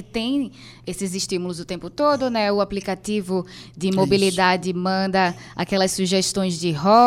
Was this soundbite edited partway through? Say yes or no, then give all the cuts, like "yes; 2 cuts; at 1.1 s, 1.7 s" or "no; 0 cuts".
no; 0 cuts